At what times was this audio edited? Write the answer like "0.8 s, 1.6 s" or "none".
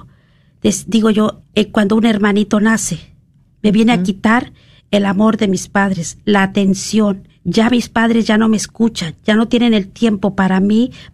1.4 s, 7.3 s